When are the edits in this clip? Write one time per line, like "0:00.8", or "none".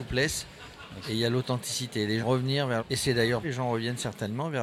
0:02.2
0:02.8
0:03.4